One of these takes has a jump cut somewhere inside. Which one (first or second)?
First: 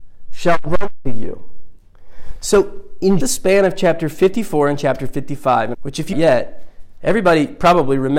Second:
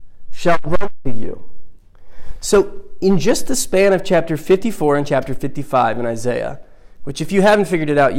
first